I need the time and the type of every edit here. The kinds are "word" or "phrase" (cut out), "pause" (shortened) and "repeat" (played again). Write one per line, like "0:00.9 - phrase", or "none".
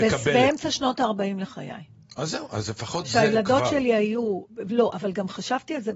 none